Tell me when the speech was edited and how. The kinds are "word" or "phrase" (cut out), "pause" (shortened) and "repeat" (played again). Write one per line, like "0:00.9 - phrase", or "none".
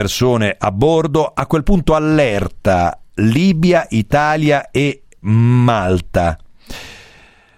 none